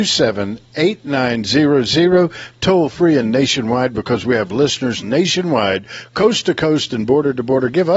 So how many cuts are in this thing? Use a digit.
1